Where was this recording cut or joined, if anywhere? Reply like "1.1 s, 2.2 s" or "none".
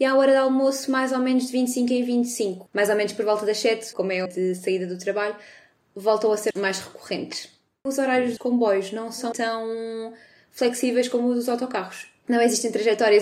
3.9 s, 4.3 s, 6.5 s, 8.4 s, 9.3 s